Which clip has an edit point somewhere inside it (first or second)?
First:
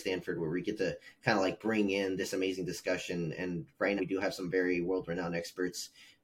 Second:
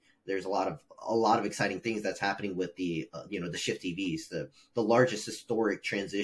first